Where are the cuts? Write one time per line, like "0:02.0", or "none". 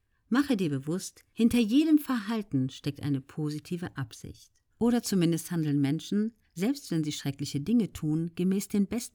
0:04.7